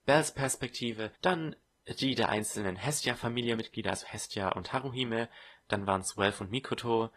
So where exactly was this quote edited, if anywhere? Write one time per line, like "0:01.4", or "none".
0:01.2